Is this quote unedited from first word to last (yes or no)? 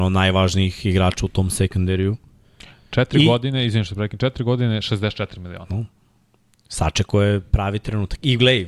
yes